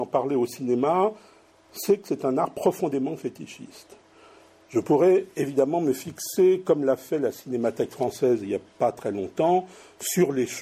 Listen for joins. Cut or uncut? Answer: uncut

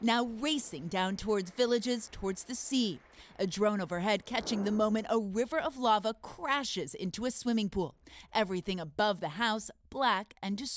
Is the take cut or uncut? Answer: uncut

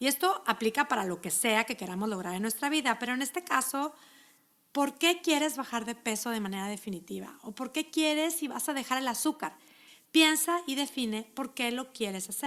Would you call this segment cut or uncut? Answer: uncut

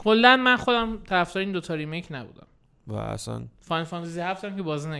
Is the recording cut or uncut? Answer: uncut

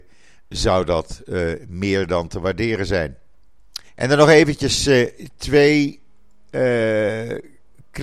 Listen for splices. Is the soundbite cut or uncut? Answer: cut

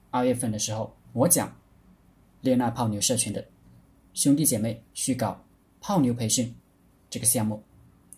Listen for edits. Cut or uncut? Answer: cut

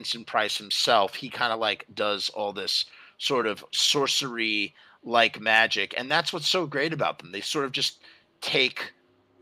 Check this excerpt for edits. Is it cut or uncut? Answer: uncut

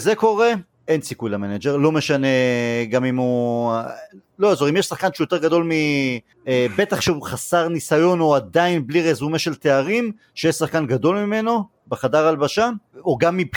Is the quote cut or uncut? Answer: uncut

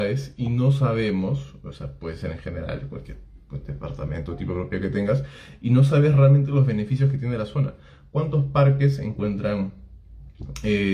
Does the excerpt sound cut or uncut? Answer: uncut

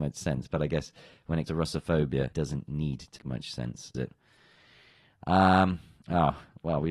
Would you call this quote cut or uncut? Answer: cut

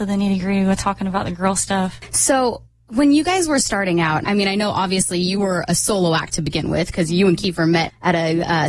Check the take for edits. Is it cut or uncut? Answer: cut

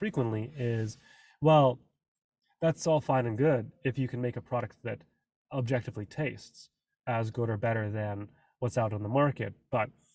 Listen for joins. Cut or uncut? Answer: uncut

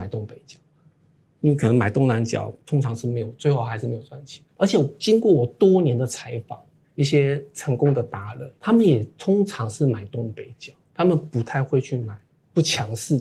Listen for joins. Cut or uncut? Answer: cut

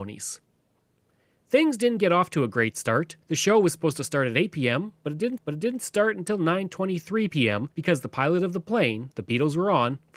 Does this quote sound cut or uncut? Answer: cut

